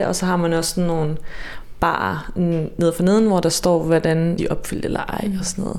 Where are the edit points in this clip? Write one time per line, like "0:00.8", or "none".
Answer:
0:04.4